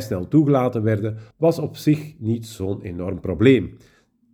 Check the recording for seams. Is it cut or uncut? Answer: cut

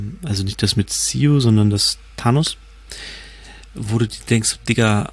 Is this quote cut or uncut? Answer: cut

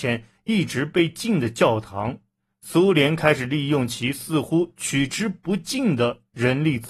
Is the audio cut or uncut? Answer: cut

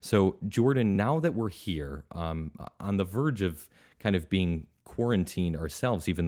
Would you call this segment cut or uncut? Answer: uncut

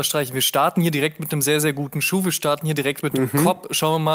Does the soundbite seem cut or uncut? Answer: uncut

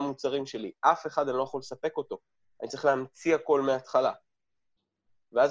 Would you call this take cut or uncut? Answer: uncut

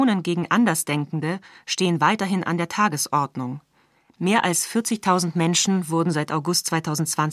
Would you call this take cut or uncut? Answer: uncut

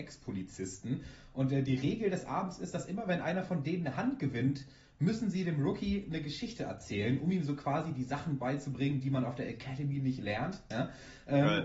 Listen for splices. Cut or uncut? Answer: uncut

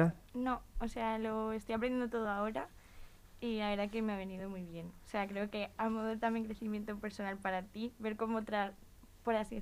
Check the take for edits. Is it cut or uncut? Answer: uncut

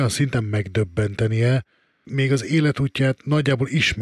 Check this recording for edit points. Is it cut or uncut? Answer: cut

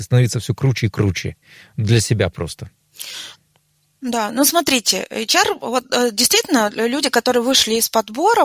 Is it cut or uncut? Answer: uncut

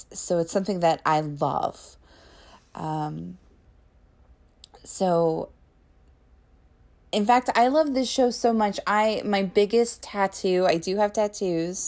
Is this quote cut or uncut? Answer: uncut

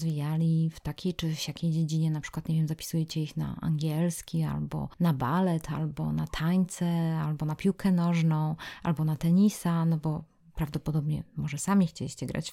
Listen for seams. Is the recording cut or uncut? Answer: uncut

